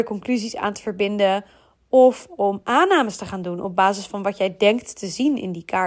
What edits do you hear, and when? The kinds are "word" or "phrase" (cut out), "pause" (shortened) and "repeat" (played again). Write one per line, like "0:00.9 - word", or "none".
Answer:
none